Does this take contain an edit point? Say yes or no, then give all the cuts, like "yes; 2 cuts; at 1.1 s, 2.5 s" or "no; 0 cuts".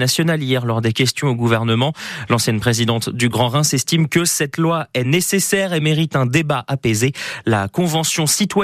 no; 0 cuts